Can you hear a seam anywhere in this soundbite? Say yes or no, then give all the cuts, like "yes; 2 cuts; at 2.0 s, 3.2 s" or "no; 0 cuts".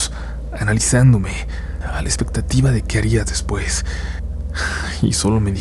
no; 0 cuts